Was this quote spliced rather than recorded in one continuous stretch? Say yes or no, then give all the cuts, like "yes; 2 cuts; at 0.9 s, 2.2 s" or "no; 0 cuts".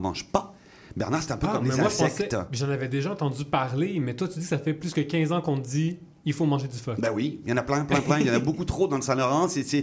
no; 0 cuts